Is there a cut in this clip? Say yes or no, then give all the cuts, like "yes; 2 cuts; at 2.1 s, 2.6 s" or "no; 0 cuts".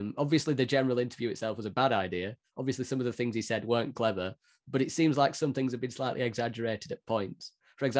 no; 0 cuts